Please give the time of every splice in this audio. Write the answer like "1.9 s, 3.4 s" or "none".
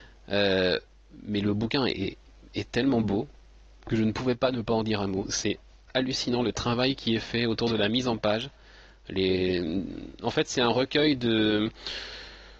none